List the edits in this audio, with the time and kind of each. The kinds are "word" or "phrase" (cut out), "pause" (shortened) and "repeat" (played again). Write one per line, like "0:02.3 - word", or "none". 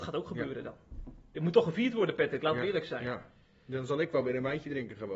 none